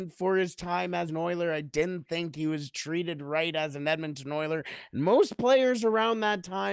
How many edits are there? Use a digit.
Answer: 1